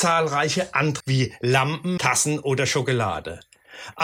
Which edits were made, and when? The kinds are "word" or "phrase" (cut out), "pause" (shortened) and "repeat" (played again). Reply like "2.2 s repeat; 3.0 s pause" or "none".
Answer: 1.0 s word; 2.0 s word